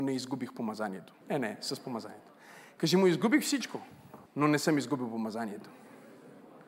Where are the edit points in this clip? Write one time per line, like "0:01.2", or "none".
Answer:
0:01.2
0:04.3